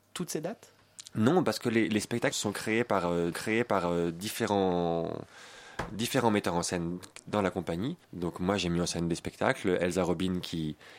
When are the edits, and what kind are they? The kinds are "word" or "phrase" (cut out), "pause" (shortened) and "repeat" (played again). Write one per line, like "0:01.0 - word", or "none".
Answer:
0:02.3 - word
0:03.3 - repeat
0:08.0 - pause

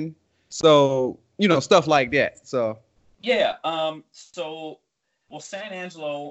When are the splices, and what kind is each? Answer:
none

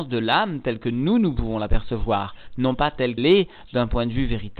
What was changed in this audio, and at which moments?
0:03.2 - word

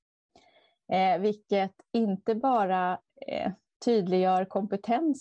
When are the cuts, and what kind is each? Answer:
none

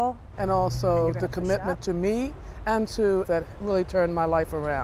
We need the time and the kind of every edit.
0:03.2 - word

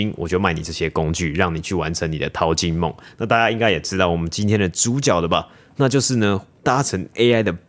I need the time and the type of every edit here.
none

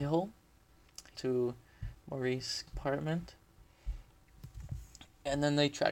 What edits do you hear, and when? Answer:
0:01.1 - word
0:02.7 - word

